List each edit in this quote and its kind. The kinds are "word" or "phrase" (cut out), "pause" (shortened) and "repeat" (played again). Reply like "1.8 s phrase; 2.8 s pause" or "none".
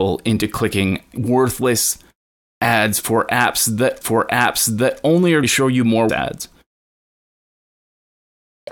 1.1 s word; 4.0 s repeat; 5.4 s word; 6.1 s word

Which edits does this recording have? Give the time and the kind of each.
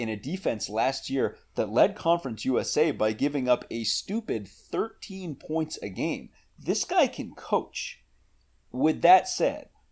none

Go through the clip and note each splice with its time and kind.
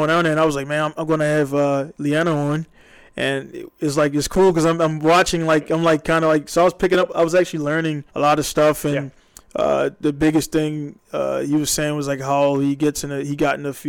8.1 s pause

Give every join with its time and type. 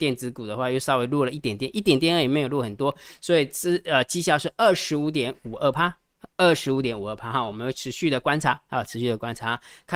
6.3 s pause

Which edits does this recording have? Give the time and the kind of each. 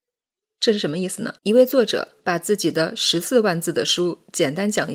1.4 s pause; 2.2 s pause

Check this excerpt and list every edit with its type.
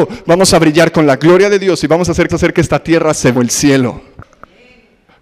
2.3 s repeat; 3.3 s phrase

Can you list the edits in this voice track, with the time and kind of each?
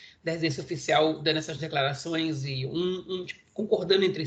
none

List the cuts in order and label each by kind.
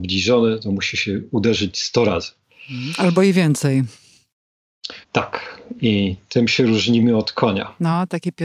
5.0 s pause

